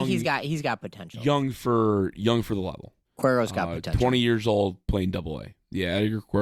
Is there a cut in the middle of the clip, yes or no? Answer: yes